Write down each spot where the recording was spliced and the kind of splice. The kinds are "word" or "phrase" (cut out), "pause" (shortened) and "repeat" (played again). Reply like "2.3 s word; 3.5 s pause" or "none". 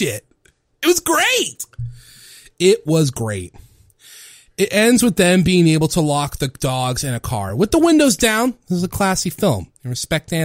none